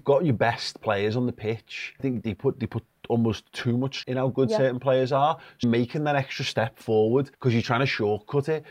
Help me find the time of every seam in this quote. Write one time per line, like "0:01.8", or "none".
0:02.0
0:02.3
0:03.5
0:04.0
0:05.6
0:07.3